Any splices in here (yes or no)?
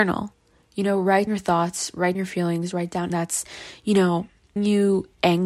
yes